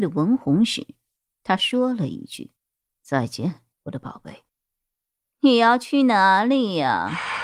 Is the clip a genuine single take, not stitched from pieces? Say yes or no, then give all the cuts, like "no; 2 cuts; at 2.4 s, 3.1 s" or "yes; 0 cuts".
no; 4 cuts; at 1.2 s, 2.6 s, 3.7 s, 4.5 s